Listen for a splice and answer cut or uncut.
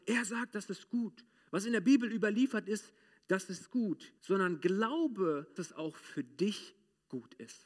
cut